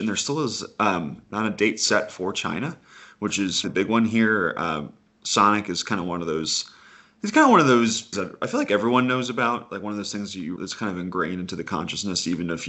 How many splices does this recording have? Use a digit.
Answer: 4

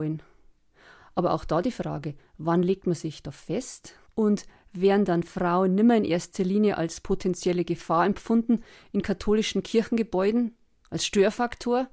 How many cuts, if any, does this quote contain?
0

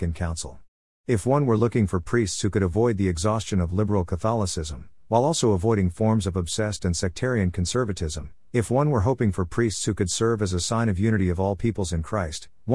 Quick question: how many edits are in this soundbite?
0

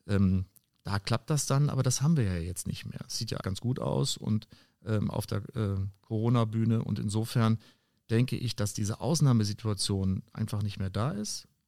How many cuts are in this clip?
1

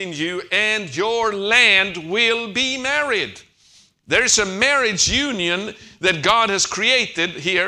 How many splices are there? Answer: 0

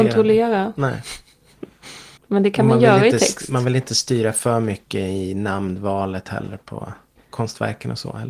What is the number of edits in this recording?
1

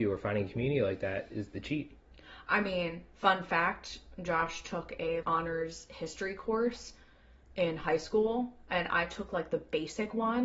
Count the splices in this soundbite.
1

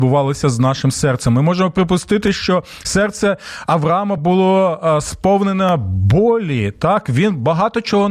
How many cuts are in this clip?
0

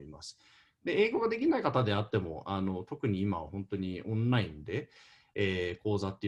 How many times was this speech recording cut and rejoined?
0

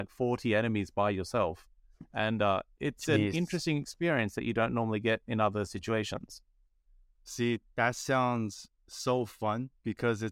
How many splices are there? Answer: 2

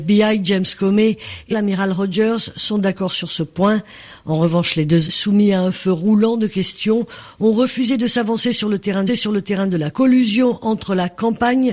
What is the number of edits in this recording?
4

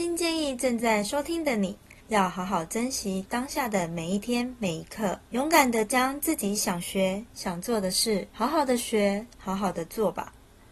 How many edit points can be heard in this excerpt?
4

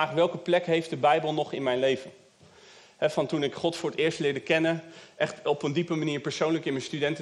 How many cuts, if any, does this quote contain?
0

